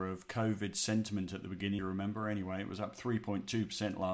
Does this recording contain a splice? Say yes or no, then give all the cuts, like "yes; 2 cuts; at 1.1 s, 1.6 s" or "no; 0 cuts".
yes; 1 cut; at 1.8 s